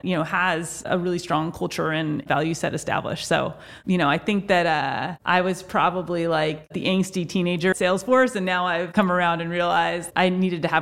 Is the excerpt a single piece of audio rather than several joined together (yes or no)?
no